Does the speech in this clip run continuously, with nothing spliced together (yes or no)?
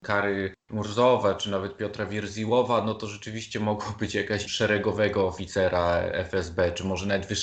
no